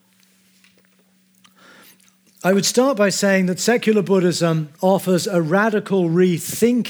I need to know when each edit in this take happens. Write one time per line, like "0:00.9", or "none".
0:04.7